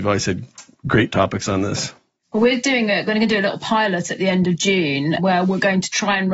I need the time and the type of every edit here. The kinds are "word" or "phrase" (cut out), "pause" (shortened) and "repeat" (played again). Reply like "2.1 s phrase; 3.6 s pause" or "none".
5.2 s word